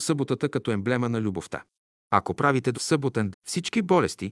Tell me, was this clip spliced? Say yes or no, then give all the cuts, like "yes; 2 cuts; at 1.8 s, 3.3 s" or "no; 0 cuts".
yes; 2 cuts; at 2.7 s, 3.3 s